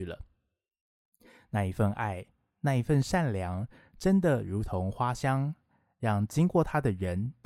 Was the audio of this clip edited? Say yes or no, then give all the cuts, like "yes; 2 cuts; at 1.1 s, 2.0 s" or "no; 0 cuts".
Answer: no; 0 cuts